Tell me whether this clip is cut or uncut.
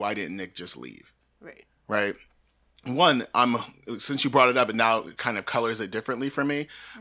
uncut